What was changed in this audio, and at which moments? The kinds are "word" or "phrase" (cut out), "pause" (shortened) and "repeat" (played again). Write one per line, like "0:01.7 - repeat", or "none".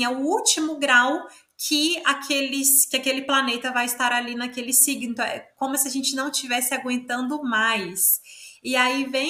none